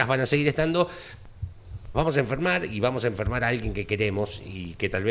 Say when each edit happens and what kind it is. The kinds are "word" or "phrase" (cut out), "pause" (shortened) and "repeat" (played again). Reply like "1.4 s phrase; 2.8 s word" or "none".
1.9 s phrase